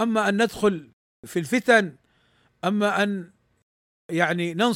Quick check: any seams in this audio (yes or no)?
no